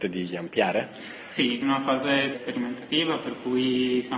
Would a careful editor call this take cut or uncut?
cut